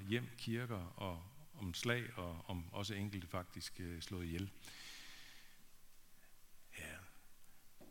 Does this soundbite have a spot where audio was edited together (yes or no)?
no